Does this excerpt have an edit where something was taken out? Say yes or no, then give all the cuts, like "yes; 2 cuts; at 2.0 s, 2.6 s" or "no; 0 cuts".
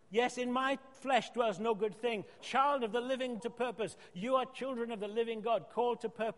yes; 2 cuts; at 2.4 s, 3.4 s